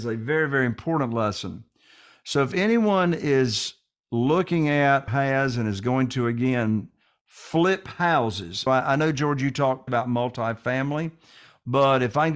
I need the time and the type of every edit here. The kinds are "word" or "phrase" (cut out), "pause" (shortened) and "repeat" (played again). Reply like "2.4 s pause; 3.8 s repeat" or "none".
5.1 s word; 8.7 s word; 9.9 s word